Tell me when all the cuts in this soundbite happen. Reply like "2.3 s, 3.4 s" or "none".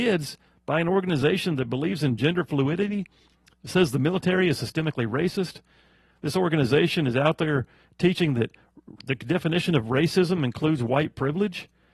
none